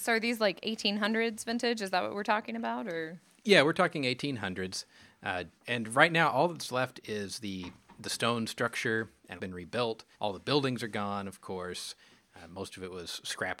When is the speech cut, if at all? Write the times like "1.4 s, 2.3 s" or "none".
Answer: 5.6 s, 9.4 s, 10.1 s